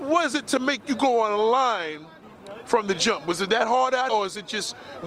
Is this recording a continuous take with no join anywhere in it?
no; 1 cut; at 4.1 s

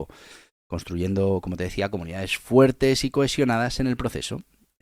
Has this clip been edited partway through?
no; 0 cuts

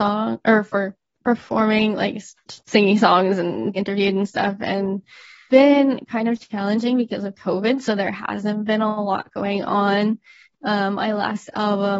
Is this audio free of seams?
no; 3 cuts; at 2.6 s, 3.8 s, 5.5 s

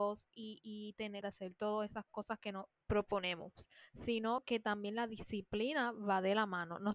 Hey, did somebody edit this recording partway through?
yes; 2 cuts; at 1.2 s, 2.8 s

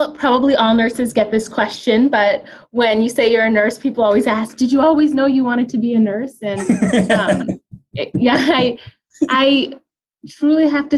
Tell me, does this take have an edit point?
no; 0 cuts

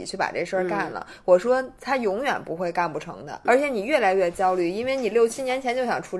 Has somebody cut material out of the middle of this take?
yes; 1 cut; at 3.4 s

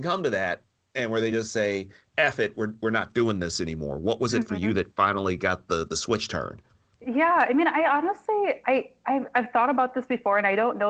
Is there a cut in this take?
no; 0 cuts

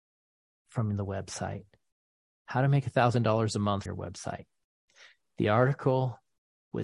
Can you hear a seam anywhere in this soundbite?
yes; 1 cut; at 3.9 s

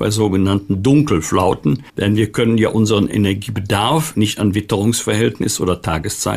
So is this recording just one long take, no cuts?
no; 1 cut; at 1.9 s

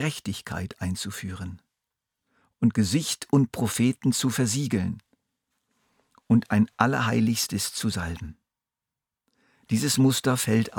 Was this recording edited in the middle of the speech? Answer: no; 0 cuts

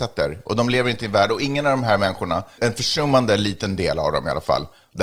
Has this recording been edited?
yes; 1 cut; at 2.6 s

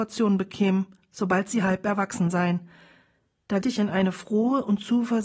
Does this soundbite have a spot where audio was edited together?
yes; 1 cut; at 3.6 s

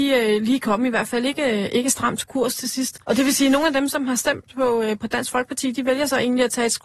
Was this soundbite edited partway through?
yes; 1 cut; at 3.0 s

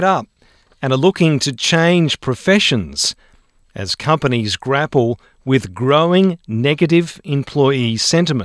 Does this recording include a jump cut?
no; 0 cuts

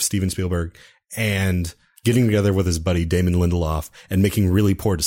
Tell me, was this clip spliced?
no; 0 cuts

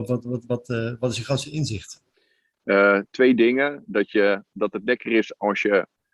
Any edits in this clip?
yes; 1 cut; at 2.1 s

